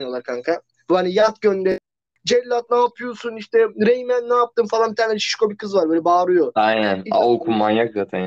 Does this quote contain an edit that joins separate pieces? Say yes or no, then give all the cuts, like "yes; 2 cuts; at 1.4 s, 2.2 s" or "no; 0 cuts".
no; 0 cuts